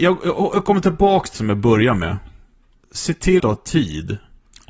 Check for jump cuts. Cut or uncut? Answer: cut